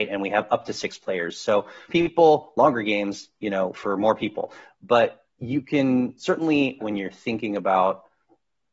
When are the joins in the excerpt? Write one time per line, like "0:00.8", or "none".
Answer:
0:01.9
0:03.7
0:05.3
0:06.8